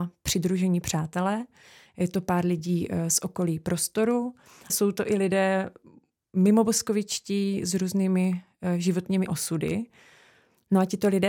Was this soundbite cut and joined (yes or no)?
yes